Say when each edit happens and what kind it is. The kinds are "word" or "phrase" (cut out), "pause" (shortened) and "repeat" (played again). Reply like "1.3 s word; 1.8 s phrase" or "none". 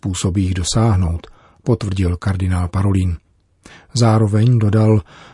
none